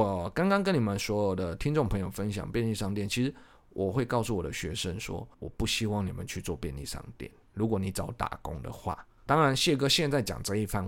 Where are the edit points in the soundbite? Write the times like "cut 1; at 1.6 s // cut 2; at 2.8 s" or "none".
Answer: cut 1; at 5.3 s // cut 2; at 7.5 s // cut 3; at 9.3 s